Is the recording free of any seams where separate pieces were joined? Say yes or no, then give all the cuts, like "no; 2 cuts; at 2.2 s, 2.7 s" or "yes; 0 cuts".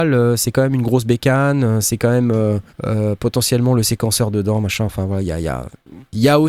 no; 1 cut; at 2.7 s